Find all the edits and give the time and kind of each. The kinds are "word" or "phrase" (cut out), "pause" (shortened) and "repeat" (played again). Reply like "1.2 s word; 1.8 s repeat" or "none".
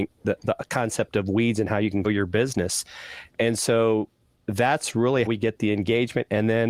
2.0 s word; 3.3 s word; 5.3 s word